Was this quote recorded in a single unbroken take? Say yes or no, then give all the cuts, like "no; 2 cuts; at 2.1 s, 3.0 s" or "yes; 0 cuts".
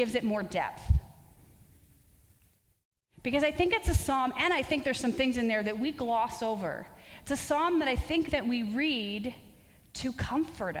yes; 0 cuts